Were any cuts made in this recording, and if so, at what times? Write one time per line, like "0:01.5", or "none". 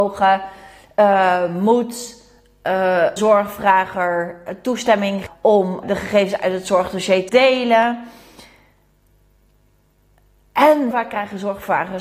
0:03.2
0:05.3
0:05.8
0:07.3
0:10.9

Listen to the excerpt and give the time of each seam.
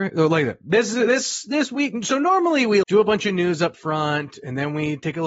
0:02.8

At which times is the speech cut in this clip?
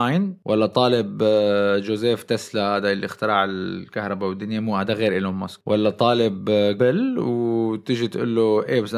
0:06.8

